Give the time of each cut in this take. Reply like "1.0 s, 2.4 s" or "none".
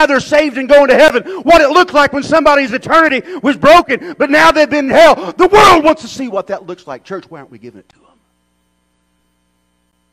4.9 s